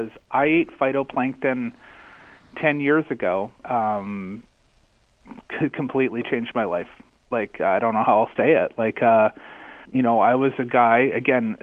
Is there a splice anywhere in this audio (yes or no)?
yes